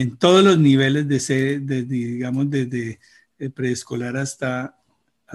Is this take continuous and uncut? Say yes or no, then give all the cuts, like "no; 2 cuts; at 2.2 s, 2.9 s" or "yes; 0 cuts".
yes; 0 cuts